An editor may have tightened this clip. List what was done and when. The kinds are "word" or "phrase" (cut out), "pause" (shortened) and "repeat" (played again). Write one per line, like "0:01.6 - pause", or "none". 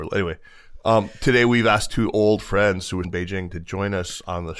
0:03.0 - word